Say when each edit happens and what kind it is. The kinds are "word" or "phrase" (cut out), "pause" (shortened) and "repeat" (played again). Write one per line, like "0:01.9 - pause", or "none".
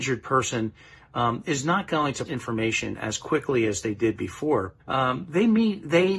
0:02.3 - word
0:04.8 - pause